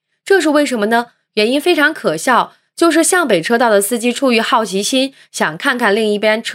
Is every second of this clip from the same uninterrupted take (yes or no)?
yes